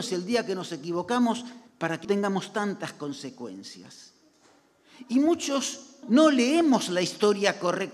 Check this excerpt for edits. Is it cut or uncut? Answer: cut